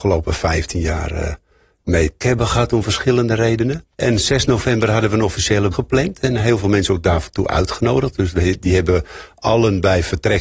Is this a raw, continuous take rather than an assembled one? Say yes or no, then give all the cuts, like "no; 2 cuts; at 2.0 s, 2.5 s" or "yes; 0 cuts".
no; 3 cuts; at 2.2 s, 3.9 s, 5.7 s